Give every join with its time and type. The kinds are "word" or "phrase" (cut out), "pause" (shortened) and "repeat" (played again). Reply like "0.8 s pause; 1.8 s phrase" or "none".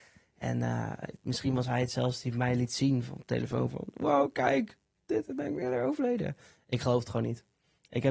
none